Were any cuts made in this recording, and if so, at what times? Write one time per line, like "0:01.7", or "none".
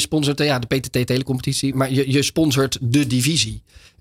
0:01.7

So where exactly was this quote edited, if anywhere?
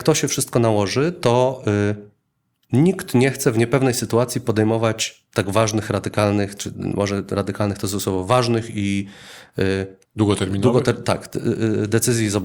0:10.1

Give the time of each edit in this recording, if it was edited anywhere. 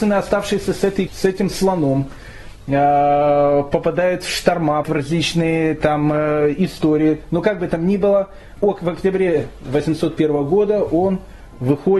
0:01.1
0:04.8
0:08.6

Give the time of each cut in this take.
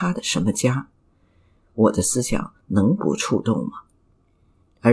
none

